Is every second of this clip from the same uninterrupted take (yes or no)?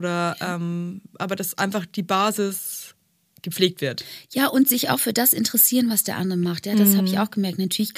yes